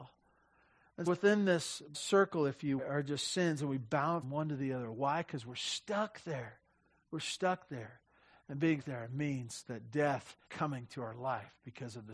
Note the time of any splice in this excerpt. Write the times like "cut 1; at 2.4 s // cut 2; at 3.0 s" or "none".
cut 1; at 1.1 s // cut 2; at 1.9 s // cut 3; at 2.8 s // cut 4; at 4.2 s // cut 5; at 8.8 s // cut 6; at 10.5 s